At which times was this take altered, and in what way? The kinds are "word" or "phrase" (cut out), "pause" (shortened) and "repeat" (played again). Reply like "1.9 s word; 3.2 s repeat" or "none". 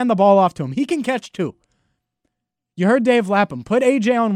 none